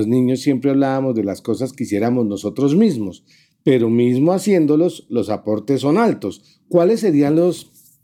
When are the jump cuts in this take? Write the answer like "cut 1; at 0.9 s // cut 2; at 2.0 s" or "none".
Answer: none